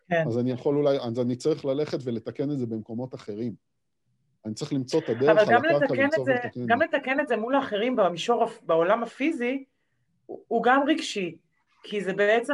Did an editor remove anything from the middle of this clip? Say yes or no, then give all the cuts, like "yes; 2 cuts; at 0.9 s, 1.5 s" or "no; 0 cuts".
no; 0 cuts